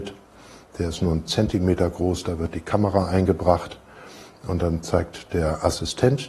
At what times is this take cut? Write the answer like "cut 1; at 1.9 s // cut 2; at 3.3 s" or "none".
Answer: none